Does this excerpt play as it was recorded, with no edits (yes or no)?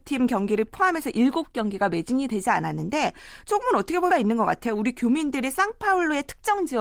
no